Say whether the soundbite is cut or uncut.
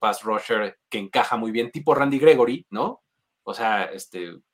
uncut